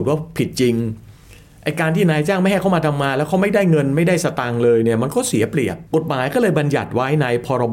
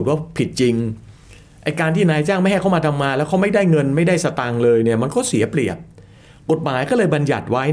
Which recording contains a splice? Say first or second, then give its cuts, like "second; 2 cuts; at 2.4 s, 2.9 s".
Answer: first; 1 cut; at 5.9 s